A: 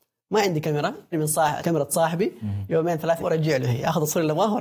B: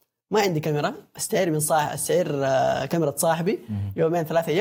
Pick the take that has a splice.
A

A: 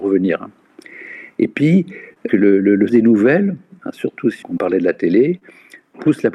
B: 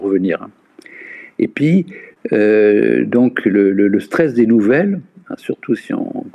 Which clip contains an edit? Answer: A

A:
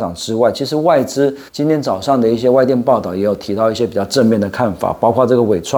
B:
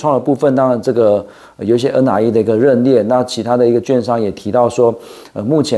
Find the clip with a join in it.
A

